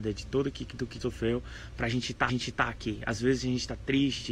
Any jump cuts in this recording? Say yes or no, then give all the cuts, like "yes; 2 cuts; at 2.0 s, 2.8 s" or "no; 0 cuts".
yes; 2 cuts; at 1.0 s, 2.3 s